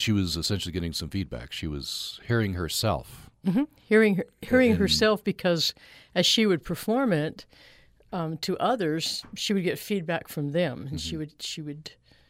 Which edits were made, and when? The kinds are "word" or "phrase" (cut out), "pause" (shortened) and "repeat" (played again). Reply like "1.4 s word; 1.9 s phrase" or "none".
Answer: none